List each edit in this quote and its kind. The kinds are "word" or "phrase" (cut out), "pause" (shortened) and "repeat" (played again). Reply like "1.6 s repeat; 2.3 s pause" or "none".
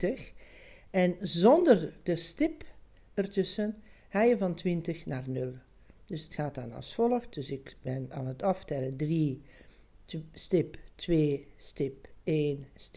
none